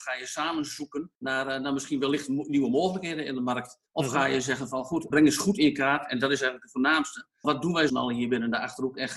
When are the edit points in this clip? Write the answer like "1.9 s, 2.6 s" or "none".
1.1 s, 3.9 s, 5.1 s, 7.4 s, 7.9 s

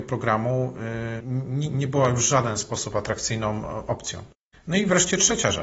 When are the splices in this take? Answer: 1.2 s

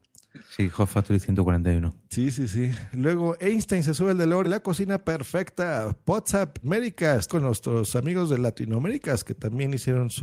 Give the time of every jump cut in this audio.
4.4 s, 6.6 s, 7.3 s

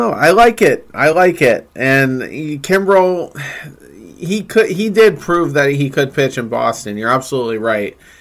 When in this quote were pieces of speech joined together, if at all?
none

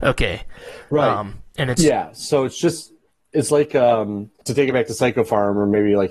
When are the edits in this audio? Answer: none

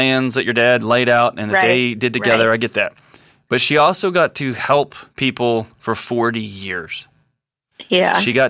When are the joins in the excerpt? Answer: 5.1 s

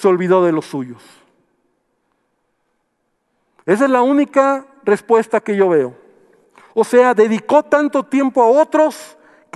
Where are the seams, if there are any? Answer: none

